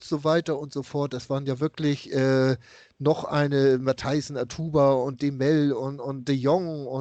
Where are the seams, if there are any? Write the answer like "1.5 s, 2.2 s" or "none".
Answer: none